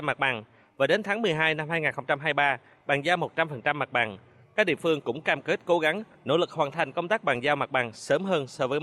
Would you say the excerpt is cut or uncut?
uncut